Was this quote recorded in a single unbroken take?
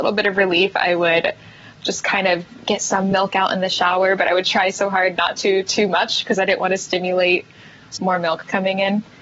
yes; 0 cuts

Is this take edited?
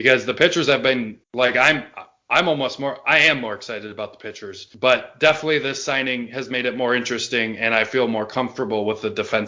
yes; 1 cut; at 1.2 s

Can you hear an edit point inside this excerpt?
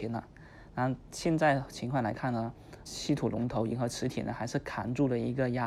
yes; 1 cut; at 2.9 s

